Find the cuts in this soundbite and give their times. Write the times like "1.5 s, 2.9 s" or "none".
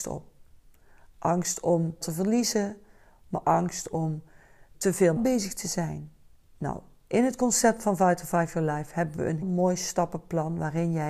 2.0 s, 3.4 s, 4.7 s, 5.2 s, 6.3 s, 9.4 s